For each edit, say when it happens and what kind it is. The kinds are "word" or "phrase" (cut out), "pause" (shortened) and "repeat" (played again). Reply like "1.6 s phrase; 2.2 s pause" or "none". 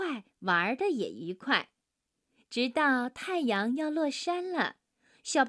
none